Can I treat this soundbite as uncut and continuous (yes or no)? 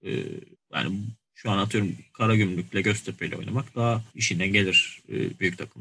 no